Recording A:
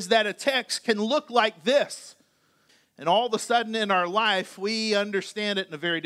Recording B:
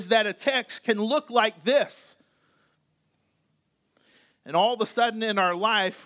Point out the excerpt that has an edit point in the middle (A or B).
A